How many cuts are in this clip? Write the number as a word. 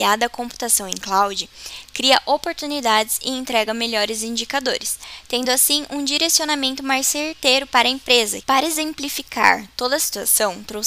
zero